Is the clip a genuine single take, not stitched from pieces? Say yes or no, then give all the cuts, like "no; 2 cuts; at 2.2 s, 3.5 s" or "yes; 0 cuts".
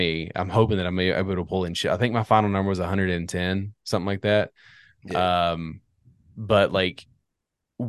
yes; 0 cuts